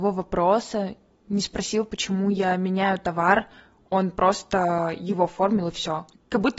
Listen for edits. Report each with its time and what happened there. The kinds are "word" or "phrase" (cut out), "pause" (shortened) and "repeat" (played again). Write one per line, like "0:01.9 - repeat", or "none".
none